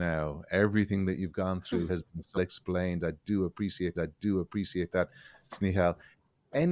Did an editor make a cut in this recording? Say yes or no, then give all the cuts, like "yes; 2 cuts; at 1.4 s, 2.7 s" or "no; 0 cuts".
yes; 3 cuts; at 1.9 s, 2.4 s, 4.0 s